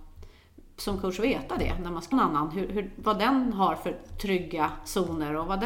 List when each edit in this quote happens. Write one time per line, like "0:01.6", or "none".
0:02.1